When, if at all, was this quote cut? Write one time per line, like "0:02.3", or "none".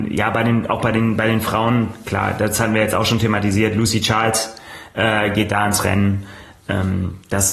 none